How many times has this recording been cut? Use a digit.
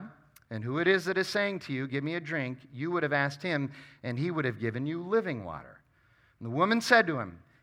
0